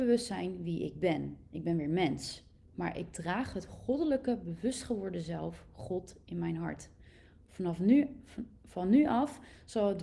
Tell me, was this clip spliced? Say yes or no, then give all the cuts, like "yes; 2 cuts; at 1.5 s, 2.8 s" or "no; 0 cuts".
no; 0 cuts